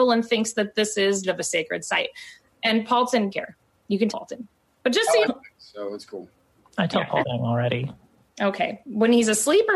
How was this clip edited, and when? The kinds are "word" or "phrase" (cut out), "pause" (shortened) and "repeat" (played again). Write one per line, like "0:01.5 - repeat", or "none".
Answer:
0:01.2 - word
0:03.3 - word
0:04.1 - word
0:05.3 - word
0:07.2 - word